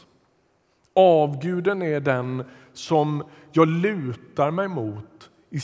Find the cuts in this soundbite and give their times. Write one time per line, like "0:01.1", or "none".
none